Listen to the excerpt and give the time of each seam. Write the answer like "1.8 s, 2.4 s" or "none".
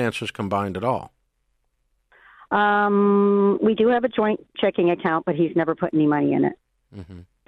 none